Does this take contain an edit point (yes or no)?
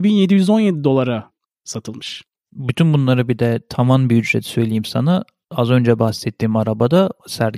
no